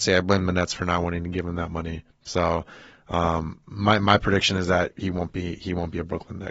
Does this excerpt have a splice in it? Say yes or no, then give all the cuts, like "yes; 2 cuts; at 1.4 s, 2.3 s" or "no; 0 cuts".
no; 0 cuts